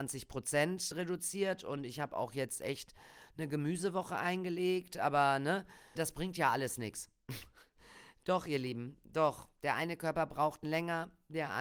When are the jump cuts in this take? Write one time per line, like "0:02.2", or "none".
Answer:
0:00.9
0:06.0
0:10.6